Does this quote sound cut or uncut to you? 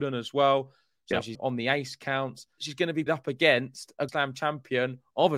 cut